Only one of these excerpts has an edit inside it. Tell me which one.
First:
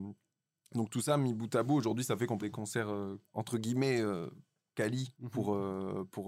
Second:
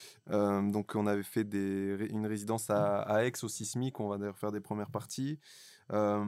first; 3 cuts; at 2.4 s, 3.3 s, 5.1 s

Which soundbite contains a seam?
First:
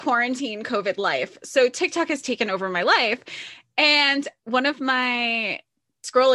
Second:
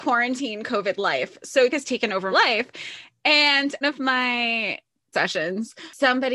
second; 4 cuts; at 1.7 s, 2.3 s, 3.8 s, 5.1 s

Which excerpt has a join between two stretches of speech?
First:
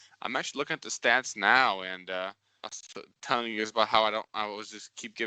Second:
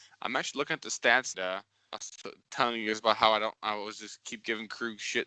second; 1 cut; at 1.3 s

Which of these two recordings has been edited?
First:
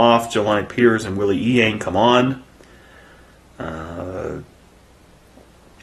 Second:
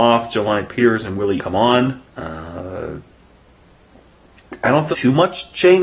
second; 3 cuts; at 1.4 s, 2.1 s, 4.9 s

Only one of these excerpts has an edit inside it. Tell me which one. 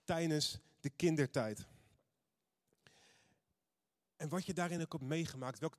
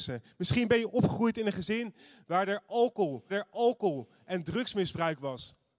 second; 1 cut; at 3.3 s

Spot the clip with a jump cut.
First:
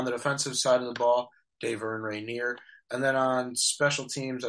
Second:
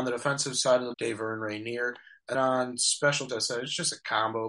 second; 3 cuts; at 0.9 s, 2.3 s, 3.3 s

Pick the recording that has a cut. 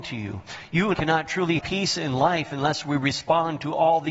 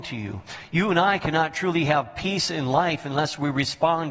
first; 2 cuts; at 0.9 s, 1.6 s

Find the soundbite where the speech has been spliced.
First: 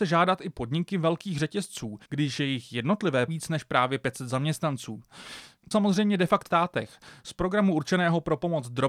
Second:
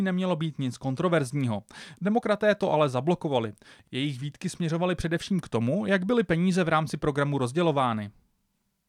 first; 4 cuts; at 2.0 s, 3.3 s, 5.7 s, 6.5 s

